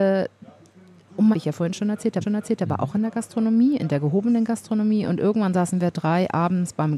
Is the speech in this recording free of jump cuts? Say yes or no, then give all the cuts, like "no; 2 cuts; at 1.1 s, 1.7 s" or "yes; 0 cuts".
no; 2 cuts; at 1.3 s, 2.2 s